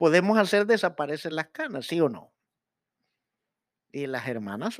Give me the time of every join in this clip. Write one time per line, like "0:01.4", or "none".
none